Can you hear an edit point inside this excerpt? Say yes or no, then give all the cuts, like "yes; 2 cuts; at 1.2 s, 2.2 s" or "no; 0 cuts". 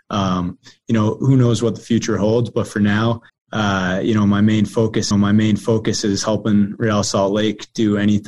yes; 3 cuts; at 1.2 s, 3.3 s, 5.1 s